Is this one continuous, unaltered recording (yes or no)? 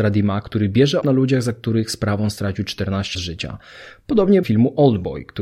no